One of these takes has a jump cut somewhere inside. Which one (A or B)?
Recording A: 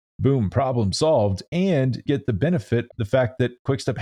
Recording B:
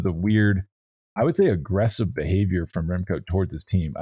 A